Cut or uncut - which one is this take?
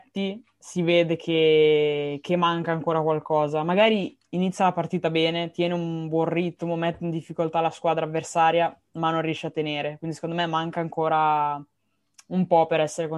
uncut